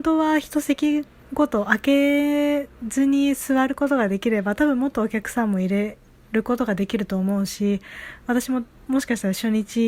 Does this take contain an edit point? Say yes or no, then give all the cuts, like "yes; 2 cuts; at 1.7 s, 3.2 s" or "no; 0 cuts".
yes; 1 cut; at 1.2 s